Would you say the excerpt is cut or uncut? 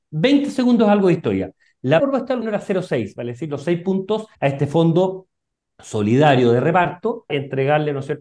cut